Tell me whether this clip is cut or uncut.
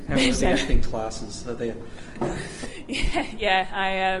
uncut